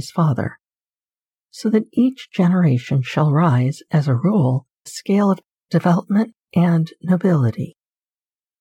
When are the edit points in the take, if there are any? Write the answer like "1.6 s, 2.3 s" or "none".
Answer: 4.9 s